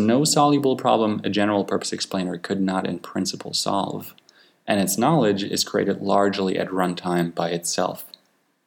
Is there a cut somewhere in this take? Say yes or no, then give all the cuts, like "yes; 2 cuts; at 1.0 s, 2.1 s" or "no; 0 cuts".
no; 0 cuts